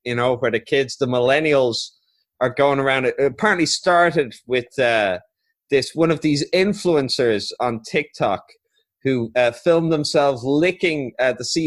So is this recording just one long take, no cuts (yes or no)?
yes